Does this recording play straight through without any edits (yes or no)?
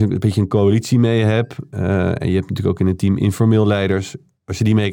yes